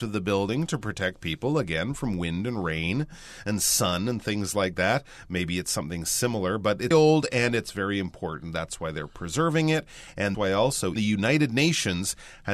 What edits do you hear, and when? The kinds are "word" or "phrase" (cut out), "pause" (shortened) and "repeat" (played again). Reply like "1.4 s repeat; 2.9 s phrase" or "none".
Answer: 6.9 s word; 10.3 s word; 11.0 s word